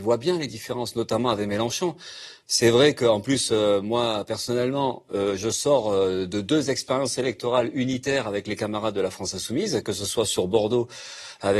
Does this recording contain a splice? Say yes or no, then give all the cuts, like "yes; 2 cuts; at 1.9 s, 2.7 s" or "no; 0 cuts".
no; 0 cuts